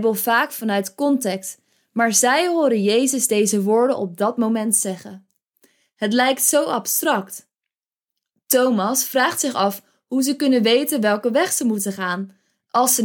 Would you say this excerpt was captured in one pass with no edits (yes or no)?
yes